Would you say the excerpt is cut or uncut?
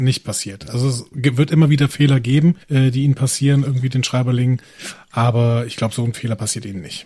cut